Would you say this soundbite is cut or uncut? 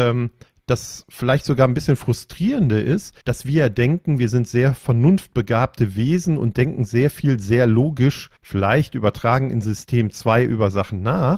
cut